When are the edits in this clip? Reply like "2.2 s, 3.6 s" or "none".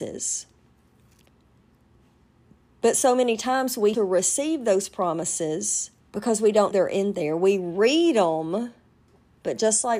3.9 s, 6.0 s, 6.7 s